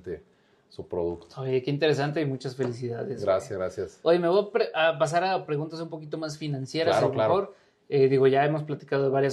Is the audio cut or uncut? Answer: uncut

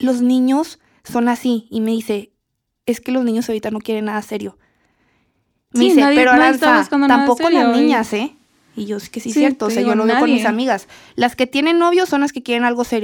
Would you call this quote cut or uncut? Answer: uncut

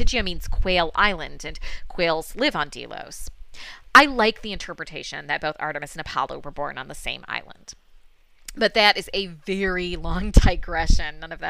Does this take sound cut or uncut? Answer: uncut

